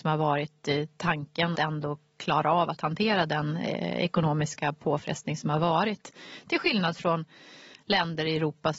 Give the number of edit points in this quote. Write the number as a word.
one